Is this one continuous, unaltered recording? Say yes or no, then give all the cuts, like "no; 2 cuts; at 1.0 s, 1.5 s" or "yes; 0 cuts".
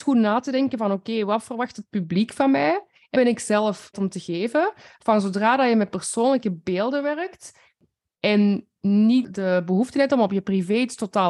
no; 3 cuts; at 3.1 s, 3.9 s, 9.2 s